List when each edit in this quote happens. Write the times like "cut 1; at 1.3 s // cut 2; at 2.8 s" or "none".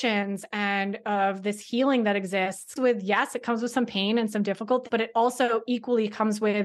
cut 1; at 2.8 s // cut 2; at 4.9 s